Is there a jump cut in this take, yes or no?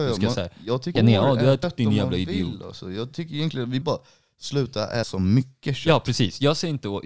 yes